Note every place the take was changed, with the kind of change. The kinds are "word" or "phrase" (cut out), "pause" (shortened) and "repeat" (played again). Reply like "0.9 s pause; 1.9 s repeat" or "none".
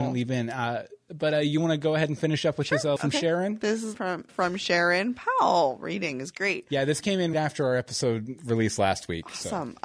3.0 s word; 3.9 s word; 4.3 s word; 7.3 s word